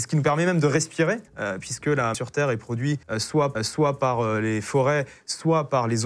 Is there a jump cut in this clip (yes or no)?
yes